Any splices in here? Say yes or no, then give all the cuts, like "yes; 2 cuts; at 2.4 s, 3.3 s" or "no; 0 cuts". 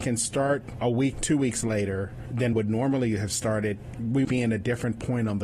yes; 3 cuts; at 1.1 s, 2.5 s, 4.2 s